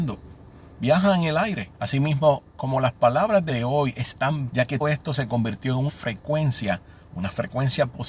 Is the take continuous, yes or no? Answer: no